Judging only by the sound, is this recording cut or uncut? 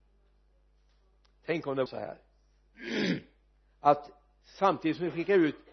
cut